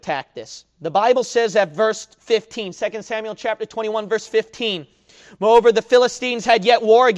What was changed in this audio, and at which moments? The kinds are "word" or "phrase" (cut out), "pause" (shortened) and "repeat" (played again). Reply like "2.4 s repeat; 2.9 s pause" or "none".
none

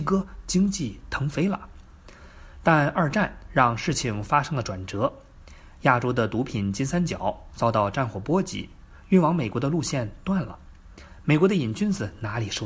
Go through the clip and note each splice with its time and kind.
none

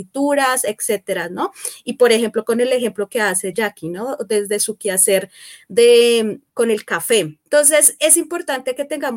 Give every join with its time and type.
6.5 s pause; 7.5 s pause

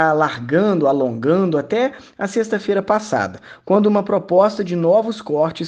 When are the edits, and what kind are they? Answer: none

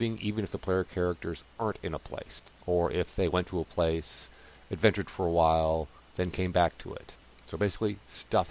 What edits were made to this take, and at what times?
none

